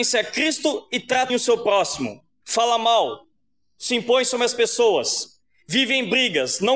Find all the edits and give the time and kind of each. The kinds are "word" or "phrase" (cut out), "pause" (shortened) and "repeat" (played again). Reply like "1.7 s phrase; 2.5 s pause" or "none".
1.3 s word